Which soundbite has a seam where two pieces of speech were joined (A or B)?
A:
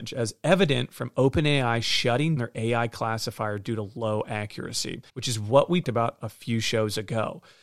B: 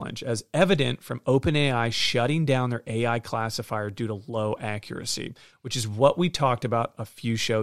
A